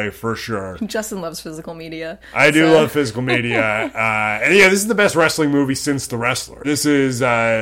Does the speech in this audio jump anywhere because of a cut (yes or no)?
yes